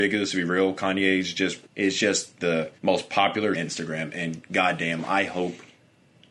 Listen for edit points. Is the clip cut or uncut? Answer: cut